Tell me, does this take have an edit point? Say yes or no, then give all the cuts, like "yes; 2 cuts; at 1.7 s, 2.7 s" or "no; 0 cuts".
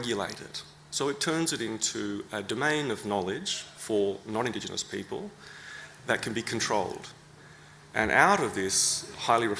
no; 0 cuts